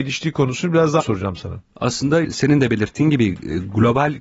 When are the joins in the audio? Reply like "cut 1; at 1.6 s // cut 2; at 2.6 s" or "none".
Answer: cut 1; at 1.0 s // cut 2; at 2.2 s